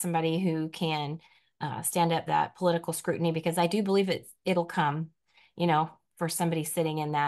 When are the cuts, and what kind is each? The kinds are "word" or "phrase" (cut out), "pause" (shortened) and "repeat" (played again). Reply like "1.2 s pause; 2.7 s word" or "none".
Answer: 2.3 s word